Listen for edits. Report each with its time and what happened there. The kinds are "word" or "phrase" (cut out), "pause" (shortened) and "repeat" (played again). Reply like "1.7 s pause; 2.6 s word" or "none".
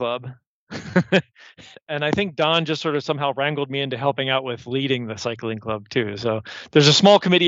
1.7 s word